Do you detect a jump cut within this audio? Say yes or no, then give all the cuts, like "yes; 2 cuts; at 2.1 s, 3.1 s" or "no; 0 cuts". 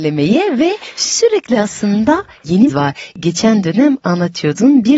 yes; 1 cut; at 2.7 s